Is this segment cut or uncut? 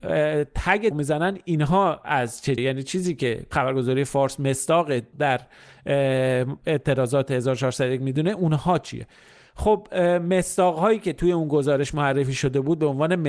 cut